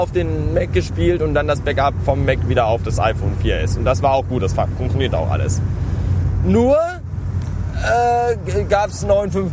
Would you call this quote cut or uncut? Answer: uncut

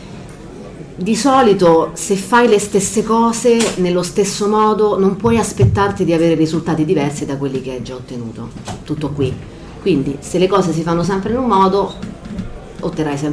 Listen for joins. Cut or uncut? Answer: uncut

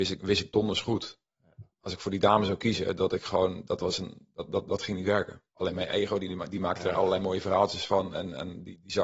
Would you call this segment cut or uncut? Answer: cut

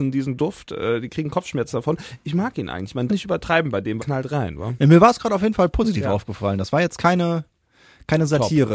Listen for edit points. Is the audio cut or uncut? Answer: cut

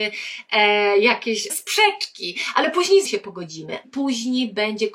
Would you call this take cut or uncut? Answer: cut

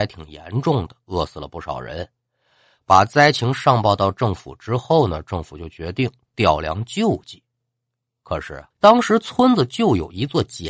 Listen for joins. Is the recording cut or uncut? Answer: cut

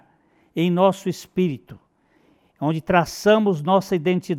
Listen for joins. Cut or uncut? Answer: uncut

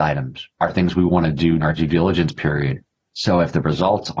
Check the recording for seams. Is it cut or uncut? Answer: cut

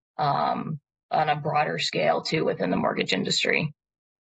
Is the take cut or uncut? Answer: uncut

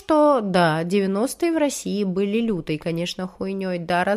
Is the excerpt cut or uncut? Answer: uncut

